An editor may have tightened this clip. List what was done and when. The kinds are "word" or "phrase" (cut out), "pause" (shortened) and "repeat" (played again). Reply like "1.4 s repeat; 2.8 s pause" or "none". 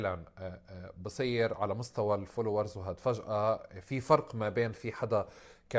none